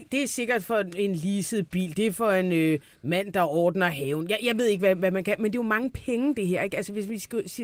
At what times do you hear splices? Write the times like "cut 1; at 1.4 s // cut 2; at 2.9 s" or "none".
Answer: none